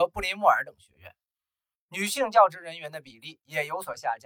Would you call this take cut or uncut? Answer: uncut